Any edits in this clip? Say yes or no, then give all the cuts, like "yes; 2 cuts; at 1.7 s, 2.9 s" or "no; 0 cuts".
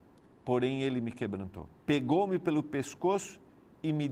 yes; 1 cut; at 1.8 s